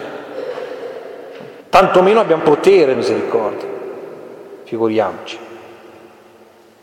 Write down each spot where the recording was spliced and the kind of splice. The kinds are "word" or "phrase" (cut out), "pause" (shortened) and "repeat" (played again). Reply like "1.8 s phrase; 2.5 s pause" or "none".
1.6 s pause; 2.4 s word; 2.9 s word